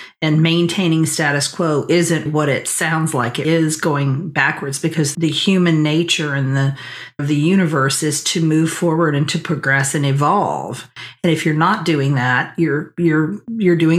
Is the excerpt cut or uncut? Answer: cut